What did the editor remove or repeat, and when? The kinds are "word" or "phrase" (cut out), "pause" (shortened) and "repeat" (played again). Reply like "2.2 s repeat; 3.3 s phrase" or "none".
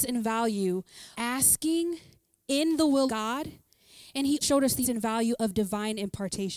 1.1 s word; 3.1 s word; 4.4 s word; 4.8 s word